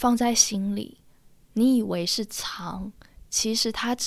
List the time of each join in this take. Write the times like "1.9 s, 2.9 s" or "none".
none